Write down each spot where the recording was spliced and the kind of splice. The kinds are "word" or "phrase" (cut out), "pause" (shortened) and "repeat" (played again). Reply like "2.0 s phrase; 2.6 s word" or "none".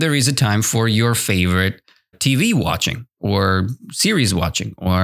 2.1 s word